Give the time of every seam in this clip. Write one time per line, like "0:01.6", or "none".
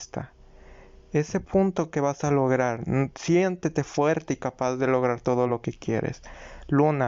none